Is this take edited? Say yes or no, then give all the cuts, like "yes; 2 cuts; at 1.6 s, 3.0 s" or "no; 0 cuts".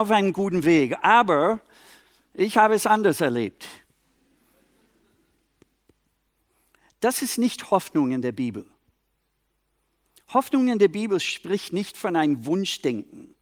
no; 0 cuts